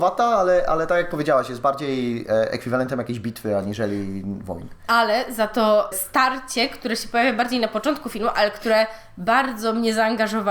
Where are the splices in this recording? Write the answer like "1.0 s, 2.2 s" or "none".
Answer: 5.9 s